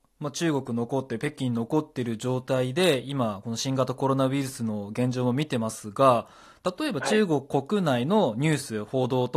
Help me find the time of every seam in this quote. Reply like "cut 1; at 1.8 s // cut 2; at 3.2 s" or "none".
none